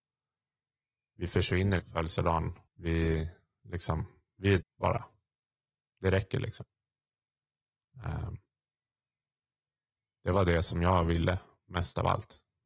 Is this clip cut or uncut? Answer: cut